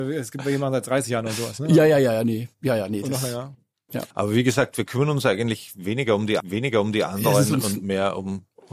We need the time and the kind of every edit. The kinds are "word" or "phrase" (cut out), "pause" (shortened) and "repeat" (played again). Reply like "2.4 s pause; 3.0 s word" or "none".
4.1 s pause; 6.4 s repeat